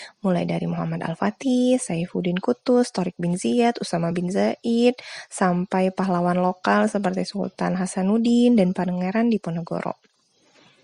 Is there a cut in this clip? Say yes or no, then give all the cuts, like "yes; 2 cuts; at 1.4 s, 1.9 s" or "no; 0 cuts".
no; 0 cuts